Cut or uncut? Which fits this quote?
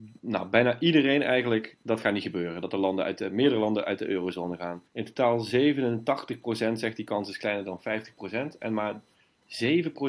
cut